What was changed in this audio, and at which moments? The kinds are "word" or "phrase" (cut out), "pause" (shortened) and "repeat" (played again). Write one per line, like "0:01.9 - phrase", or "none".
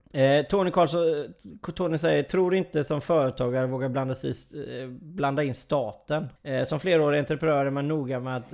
0:06.4 - pause